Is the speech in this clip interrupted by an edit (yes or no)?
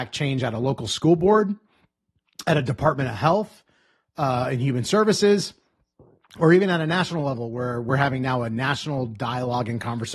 no